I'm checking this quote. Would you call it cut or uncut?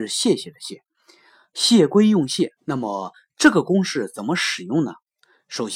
cut